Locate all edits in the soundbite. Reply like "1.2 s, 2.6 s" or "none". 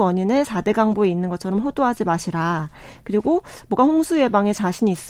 3.8 s